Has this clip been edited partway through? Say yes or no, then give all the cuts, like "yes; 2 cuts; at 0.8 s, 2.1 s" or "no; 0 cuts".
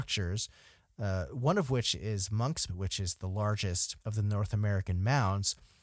yes; 2 cuts; at 2.7 s, 4.0 s